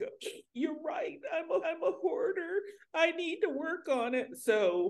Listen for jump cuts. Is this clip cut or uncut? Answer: cut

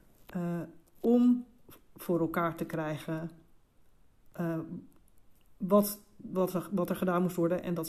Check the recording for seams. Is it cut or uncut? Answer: uncut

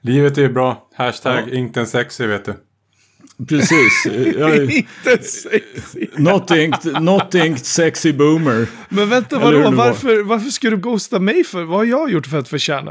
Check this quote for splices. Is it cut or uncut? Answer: cut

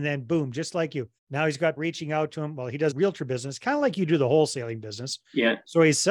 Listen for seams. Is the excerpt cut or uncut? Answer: cut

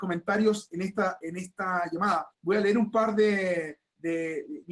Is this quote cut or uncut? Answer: cut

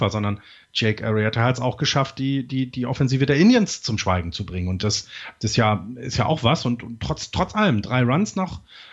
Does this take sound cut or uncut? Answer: uncut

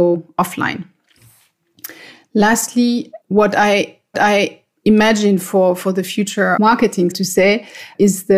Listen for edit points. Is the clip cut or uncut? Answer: cut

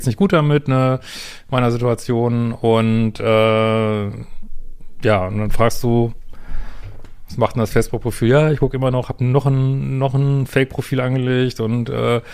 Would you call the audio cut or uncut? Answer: uncut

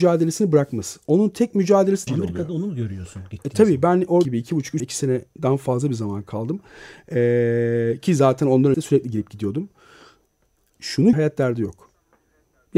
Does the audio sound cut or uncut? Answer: cut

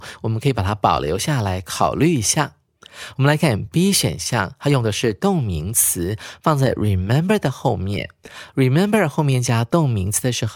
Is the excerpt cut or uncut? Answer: uncut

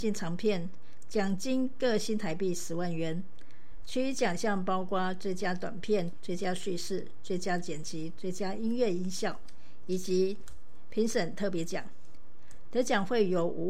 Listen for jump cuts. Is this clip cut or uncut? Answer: cut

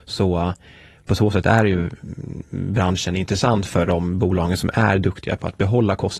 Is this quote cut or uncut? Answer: uncut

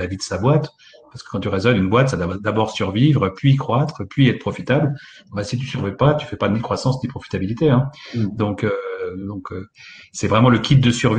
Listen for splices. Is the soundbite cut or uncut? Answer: uncut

